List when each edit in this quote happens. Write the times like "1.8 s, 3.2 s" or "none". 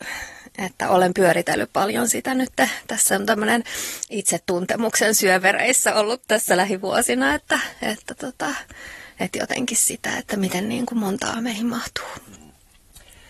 11.3 s